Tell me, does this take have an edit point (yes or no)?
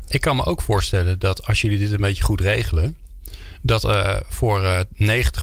no